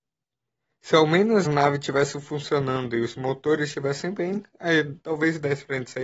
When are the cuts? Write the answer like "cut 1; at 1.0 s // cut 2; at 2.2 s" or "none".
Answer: cut 1; at 1.5 s